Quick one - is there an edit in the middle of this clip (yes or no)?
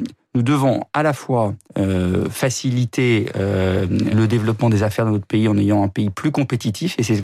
yes